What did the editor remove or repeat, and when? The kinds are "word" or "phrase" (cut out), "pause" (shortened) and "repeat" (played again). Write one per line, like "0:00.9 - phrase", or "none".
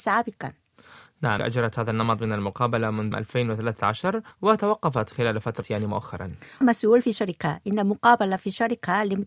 0:01.4 - phrase
0:03.1 - word
0:04.3 - pause
0:05.6 - phrase
0:06.6 - word